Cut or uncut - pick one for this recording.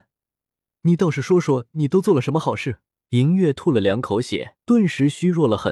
cut